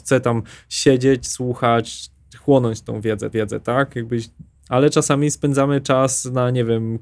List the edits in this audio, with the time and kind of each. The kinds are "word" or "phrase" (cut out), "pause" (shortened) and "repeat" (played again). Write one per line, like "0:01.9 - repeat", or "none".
0:03.3 - repeat
0:04.6 - word